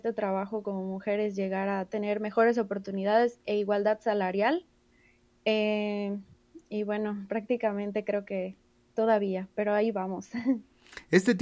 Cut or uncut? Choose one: uncut